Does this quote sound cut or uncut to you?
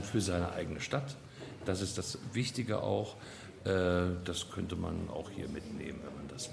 uncut